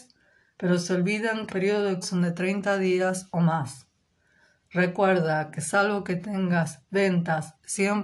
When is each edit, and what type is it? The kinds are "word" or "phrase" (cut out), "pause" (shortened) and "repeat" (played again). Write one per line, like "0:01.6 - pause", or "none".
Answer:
0:01.5 - word
0:02.0 - word